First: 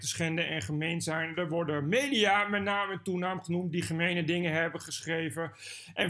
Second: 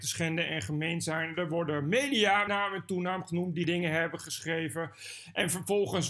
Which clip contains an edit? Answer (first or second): second